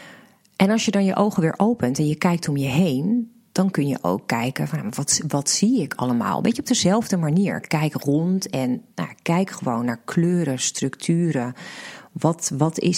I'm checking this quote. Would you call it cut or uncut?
cut